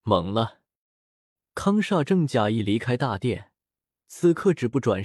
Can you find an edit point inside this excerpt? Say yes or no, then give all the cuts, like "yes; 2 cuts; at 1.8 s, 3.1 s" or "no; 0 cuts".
no; 0 cuts